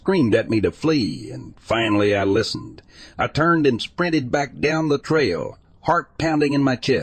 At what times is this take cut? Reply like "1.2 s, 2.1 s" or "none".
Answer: none